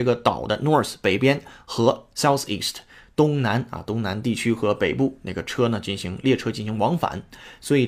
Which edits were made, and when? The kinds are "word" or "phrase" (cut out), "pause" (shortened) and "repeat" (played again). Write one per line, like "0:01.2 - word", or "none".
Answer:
none